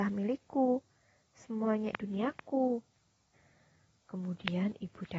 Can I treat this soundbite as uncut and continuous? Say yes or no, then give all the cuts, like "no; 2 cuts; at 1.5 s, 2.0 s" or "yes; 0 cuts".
no; 1 cut; at 1.9 s